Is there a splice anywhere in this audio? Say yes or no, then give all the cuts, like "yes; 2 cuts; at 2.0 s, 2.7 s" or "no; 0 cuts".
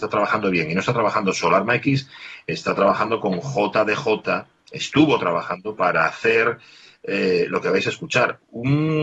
no; 0 cuts